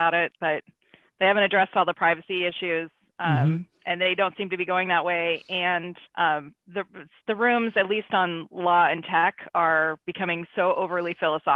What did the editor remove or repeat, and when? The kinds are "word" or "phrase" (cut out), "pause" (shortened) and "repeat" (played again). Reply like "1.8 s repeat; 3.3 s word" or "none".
6.1 s pause